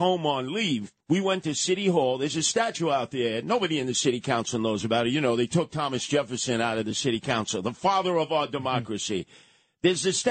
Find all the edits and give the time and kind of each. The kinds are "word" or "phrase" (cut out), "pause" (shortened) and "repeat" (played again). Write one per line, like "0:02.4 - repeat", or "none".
0:01.0 - pause